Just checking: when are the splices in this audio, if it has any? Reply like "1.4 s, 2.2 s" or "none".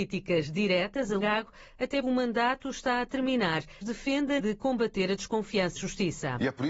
1.2 s, 2.0 s, 3.8 s, 4.4 s, 5.8 s